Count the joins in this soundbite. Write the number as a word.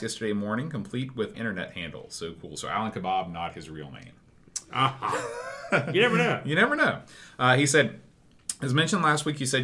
one